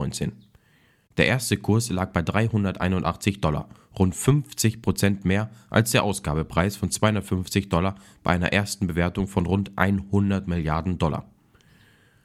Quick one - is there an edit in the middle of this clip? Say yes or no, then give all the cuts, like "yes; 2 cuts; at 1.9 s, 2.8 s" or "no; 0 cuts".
no; 0 cuts